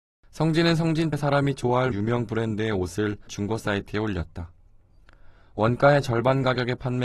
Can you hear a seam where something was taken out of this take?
yes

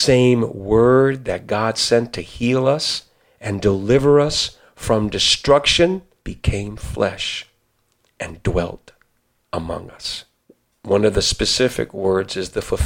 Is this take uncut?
yes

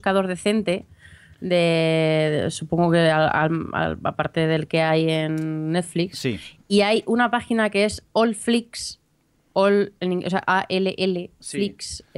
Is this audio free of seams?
yes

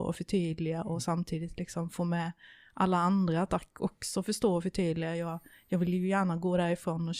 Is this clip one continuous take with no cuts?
yes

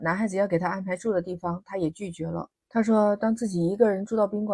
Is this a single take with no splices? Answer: no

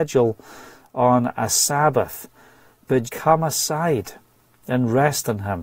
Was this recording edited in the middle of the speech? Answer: yes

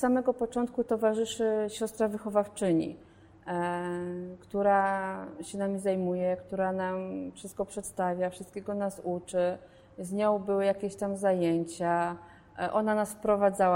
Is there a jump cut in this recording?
no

